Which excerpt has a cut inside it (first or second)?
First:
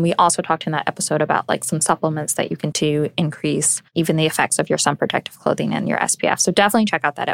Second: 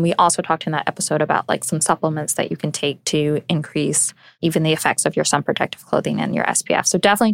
first